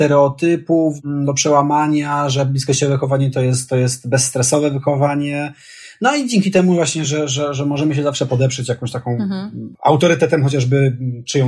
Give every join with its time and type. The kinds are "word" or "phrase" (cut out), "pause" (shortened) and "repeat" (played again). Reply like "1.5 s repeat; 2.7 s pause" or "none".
none